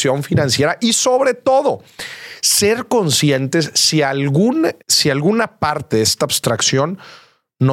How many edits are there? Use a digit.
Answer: 1